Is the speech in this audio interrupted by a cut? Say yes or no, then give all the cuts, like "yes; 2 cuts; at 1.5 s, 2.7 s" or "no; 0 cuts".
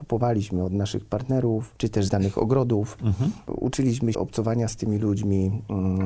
yes; 2 cuts; at 2.1 s, 4.1 s